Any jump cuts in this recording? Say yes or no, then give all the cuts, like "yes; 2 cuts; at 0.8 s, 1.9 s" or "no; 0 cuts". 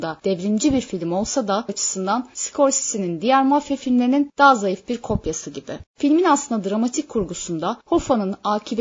yes; 2 cuts; at 1.7 s, 5.9 s